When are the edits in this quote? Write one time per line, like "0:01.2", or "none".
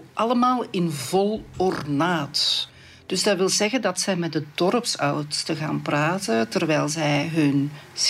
none